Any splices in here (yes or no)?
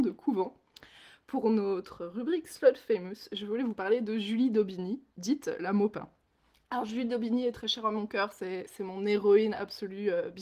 no